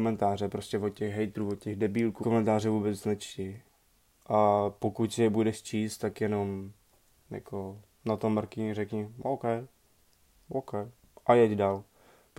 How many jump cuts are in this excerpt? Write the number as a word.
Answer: one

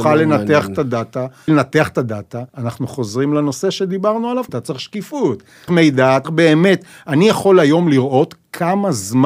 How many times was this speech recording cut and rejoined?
five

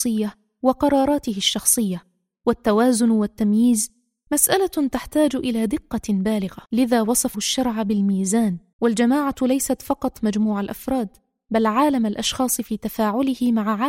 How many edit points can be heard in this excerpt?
three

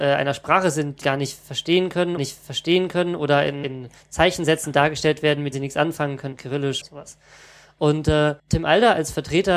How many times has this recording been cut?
seven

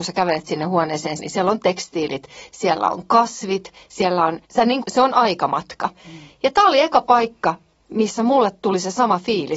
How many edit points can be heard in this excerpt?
three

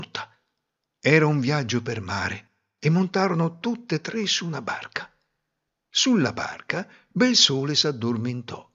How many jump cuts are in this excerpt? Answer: zero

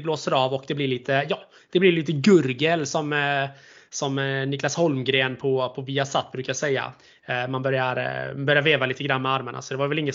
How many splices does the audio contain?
zero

